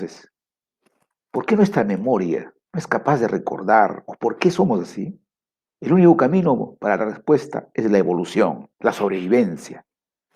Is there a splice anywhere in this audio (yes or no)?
yes